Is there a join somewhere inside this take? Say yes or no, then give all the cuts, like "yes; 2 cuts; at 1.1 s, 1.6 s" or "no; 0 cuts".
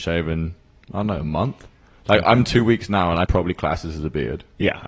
yes; 1 cut; at 3.3 s